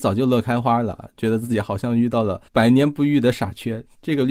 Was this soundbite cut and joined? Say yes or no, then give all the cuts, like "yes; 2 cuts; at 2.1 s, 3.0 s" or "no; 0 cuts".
yes; 1 cut; at 2.5 s